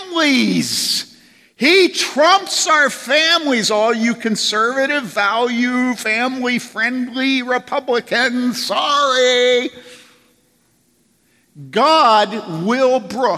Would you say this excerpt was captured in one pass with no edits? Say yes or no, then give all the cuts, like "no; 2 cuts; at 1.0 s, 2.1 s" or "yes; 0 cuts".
yes; 0 cuts